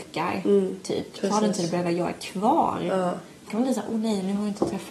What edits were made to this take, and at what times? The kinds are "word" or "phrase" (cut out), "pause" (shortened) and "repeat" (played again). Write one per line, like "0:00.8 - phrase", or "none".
0:03.5 - word